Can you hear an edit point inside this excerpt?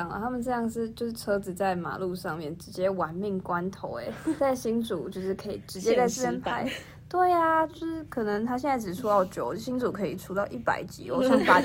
yes; 1 cut; at 4.4 s

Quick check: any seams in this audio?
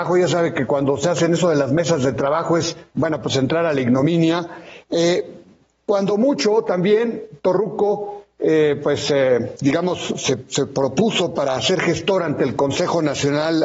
yes; 1 cut; at 2.9 s

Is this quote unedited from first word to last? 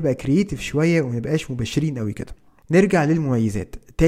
yes; 0 cuts

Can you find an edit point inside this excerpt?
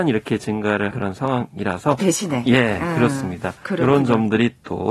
yes; 2 cuts; at 0.9 s, 2.0 s

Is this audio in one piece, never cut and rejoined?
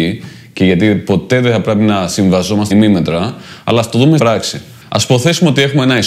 no; 2 cuts; at 2.7 s, 4.2 s

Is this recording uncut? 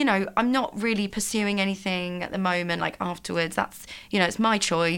yes; 0 cuts

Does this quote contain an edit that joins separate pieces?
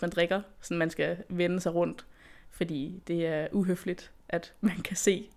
no; 0 cuts

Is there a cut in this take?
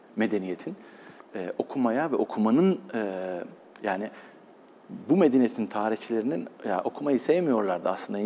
no; 0 cuts

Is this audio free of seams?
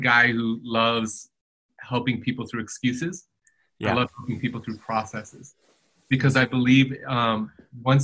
yes; 0 cuts

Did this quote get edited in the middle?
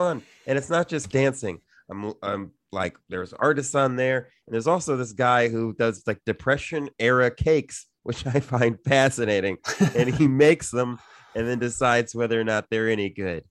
yes; 2 cuts; at 1.1 s, 3.0 s

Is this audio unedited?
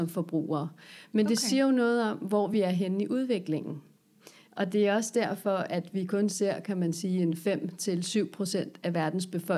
yes; 0 cuts

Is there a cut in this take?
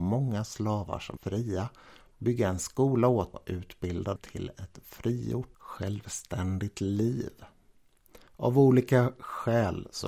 yes; 4 cuts; at 1.2 s, 3.3 s, 4.2 s, 8.3 s

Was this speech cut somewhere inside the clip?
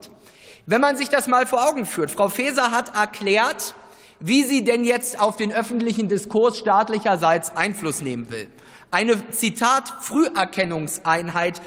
no; 0 cuts

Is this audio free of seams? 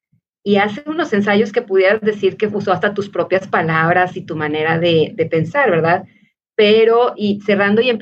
yes; 0 cuts

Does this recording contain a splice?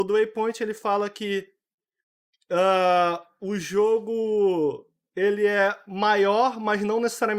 no; 0 cuts

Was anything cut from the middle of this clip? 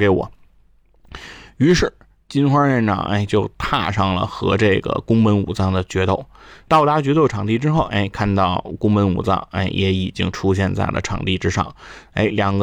no; 0 cuts

